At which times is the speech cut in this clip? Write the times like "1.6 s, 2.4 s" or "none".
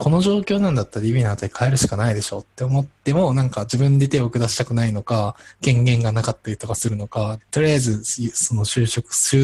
7.4 s